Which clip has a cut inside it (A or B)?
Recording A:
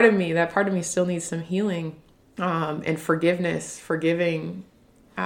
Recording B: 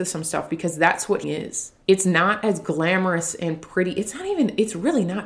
B